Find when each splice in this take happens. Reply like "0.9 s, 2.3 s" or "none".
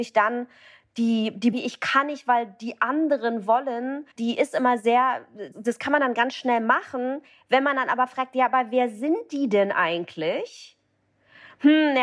1.5 s, 4.1 s, 5.5 s